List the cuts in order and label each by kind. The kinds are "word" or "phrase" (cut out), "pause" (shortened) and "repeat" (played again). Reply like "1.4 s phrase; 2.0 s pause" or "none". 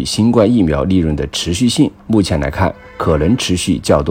2.0 s pause